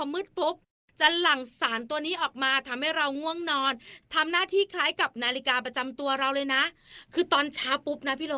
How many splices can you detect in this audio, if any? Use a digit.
0